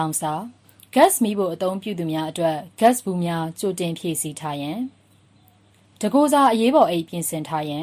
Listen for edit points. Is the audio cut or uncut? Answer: uncut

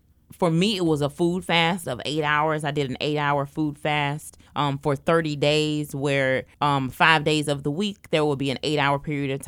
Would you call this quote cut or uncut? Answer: cut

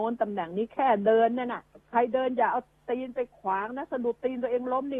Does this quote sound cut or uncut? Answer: cut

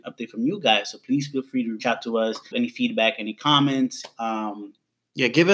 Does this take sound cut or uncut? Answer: cut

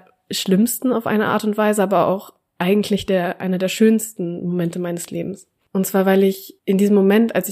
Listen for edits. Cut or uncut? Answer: uncut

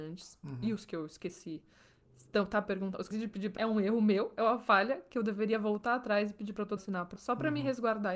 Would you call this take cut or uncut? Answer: cut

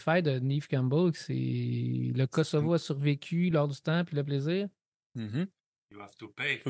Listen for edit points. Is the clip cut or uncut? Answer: uncut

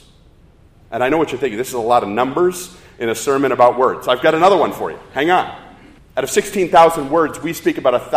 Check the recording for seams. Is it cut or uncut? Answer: cut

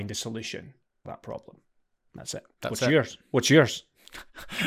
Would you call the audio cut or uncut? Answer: cut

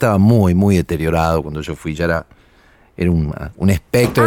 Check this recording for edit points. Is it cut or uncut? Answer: uncut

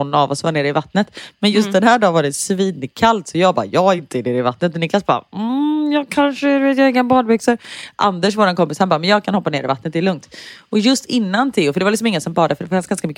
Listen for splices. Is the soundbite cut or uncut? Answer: uncut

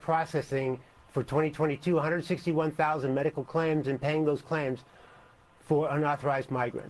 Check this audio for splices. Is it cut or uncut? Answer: uncut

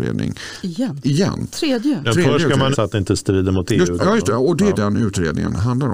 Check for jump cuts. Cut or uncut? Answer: cut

